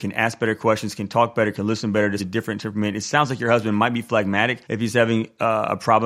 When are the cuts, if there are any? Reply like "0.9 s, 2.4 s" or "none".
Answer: 2.2 s, 4.6 s